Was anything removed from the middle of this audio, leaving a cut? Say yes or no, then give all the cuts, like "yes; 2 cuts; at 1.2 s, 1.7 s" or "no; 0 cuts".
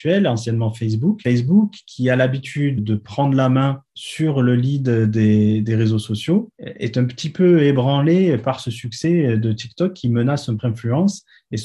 yes; 3 cuts; at 2.8 s, 3.9 s, 10.6 s